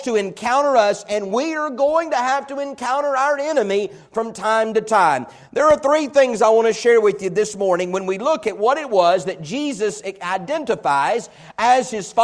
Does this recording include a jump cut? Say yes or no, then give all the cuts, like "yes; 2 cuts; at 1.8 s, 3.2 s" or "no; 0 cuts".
no; 0 cuts